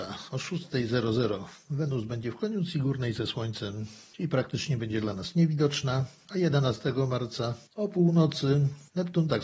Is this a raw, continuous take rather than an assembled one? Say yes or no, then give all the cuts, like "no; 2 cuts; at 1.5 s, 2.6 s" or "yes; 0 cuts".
yes; 0 cuts